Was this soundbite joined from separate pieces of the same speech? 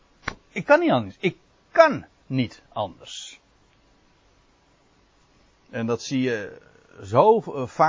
no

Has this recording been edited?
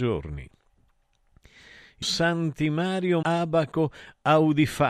yes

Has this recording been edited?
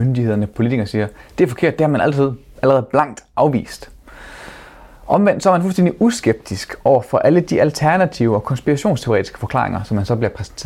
no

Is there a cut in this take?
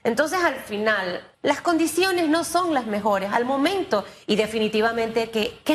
yes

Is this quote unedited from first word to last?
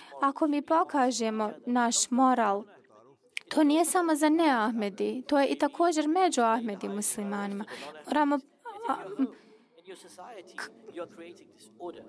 yes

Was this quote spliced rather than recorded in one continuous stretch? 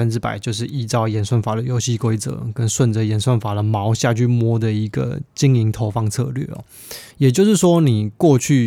yes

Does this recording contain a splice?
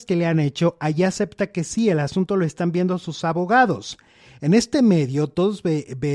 no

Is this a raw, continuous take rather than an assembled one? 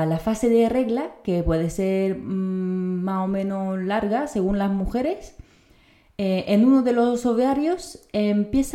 yes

